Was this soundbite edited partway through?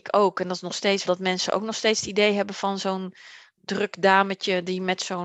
yes; 1 cut; at 1.0 s

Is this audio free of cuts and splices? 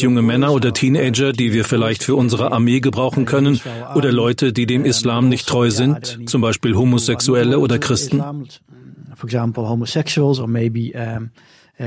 yes; 0 cuts

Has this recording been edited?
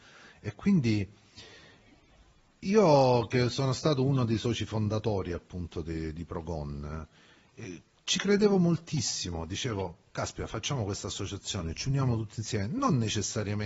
no; 0 cuts

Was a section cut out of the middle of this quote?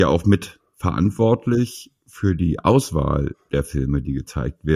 no; 0 cuts

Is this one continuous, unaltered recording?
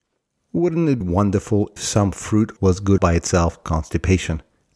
no; 5 cuts; at 1.0 s, 1.8 s, 2.6 s, 3.0 s, 3.6 s

